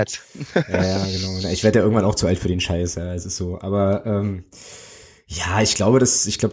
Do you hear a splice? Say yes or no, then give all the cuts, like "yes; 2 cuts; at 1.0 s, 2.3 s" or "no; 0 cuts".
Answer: no; 0 cuts